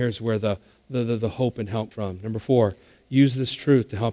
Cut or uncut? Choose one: cut